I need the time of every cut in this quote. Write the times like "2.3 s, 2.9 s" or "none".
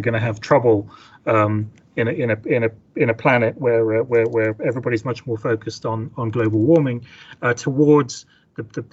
none